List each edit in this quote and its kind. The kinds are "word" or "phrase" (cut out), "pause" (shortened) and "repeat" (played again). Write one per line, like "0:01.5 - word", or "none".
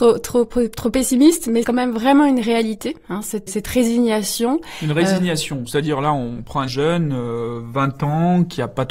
0:01.6 - word
0:03.5 - word
0:06.7 - phrase